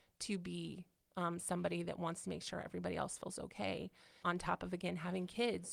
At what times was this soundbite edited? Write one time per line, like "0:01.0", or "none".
none